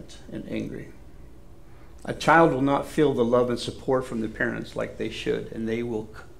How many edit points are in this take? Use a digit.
0